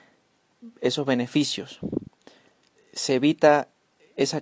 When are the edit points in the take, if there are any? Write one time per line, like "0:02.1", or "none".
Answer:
0:02.8